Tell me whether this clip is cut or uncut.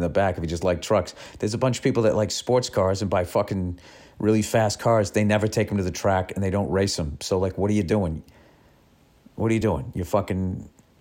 uncut